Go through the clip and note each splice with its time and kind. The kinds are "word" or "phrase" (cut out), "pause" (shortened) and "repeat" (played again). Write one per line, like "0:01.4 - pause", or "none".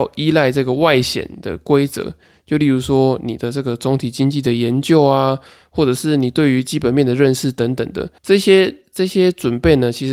0:08.2 - pause